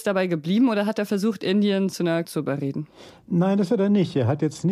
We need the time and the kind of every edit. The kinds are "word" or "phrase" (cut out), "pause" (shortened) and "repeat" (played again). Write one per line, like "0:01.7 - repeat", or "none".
0:02.2 - word